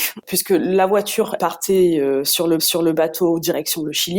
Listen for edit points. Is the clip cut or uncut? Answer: cut